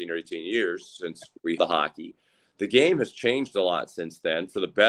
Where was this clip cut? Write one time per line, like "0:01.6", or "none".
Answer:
0:01.6